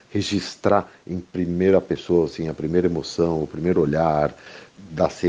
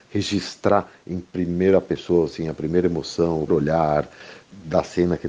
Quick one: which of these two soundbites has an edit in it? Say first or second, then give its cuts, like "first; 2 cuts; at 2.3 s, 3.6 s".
second; 1 cut; at 3.5 s